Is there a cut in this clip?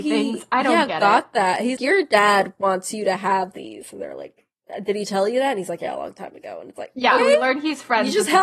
yes; 2 cuts; at 1.8 s, 7.2 s

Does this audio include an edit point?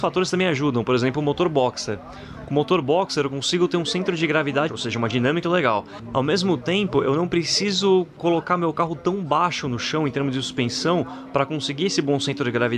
yes; 2 cuts; at 4.7 s, 5.4 s

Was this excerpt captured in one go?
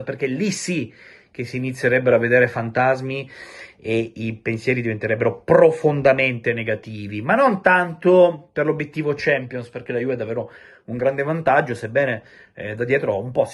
yes; 0 cuts

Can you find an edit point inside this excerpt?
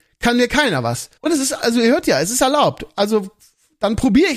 yes; 1 cut; at 1.2 s

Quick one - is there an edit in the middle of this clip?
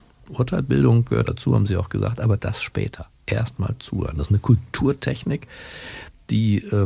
yes; 1 cut; at 1.2 s

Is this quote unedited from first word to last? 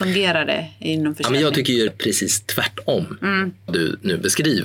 no; 2 cuts; at 1.9 s, 3.7 s

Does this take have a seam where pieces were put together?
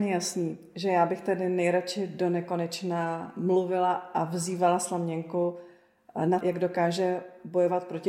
yes; 1 cut; at 6.4 s

